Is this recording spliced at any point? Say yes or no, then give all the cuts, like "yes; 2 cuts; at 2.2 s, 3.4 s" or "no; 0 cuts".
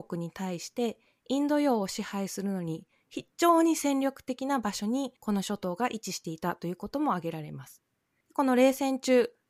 yes; 1 cut; at 5.2 s